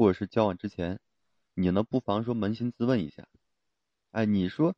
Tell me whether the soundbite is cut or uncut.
uncut